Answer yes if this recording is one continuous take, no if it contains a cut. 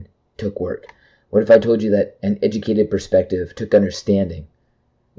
yes